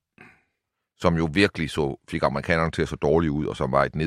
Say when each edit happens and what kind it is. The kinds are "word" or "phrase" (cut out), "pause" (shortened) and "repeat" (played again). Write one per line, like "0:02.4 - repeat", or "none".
none